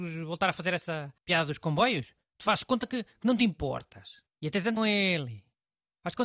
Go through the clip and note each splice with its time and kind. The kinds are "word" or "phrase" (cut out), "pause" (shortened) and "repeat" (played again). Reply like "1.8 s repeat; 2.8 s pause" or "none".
1.2 s pause; 4.3 s pause; 4.8 s phrase